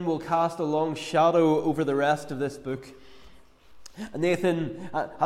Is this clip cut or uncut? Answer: uncut